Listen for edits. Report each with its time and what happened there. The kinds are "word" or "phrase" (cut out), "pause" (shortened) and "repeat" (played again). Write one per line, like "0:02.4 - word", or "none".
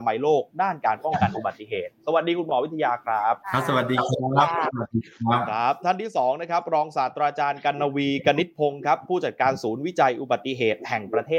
0:03.4 - pause